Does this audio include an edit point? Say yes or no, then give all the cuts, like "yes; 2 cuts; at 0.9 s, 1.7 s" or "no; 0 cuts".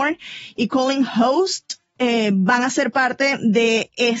no; 0 cuts